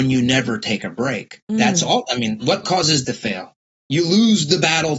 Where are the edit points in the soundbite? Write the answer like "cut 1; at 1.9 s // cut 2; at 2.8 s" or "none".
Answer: cut 1; at 1.4 s // cut 2; at 2.6 s // cut 3; at 3.0 s